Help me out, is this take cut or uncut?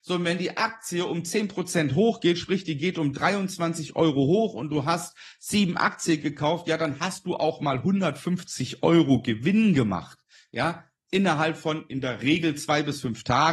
uncut